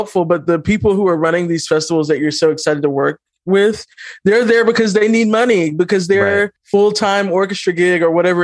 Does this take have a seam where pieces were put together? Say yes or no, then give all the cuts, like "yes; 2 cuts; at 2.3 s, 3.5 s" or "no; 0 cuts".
yes; 1 cut; at 6.6 s